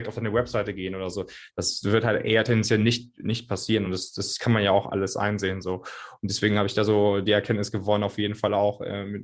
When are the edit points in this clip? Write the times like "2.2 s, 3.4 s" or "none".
none